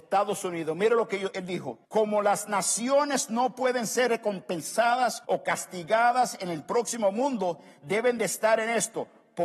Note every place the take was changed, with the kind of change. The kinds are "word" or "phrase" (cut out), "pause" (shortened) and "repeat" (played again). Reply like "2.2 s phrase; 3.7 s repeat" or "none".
1.3 s word; 1.8 s pause; 5.2 s pause